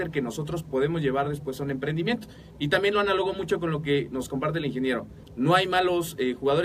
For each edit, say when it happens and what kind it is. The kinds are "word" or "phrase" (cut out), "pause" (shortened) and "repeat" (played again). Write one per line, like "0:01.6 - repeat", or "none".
none